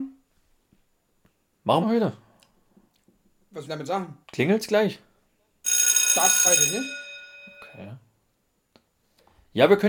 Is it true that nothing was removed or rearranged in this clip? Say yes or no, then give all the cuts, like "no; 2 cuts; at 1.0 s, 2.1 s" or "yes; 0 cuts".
no; 4 cuts; at 1.8 s, 3.6 s, 4.2 s, 6.4 s